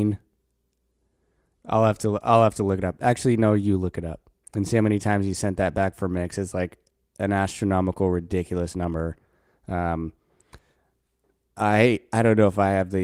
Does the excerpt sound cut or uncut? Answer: uncut